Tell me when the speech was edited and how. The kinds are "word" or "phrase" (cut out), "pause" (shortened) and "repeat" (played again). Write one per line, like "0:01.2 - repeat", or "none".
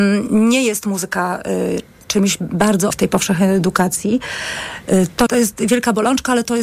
0:02.9 - word
0:05.3 - word